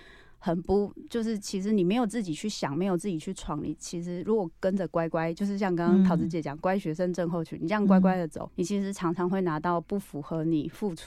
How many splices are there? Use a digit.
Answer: 1